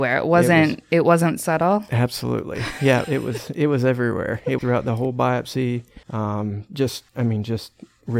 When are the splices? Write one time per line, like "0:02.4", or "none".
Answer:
0:04.6
0:06.0
0:07.1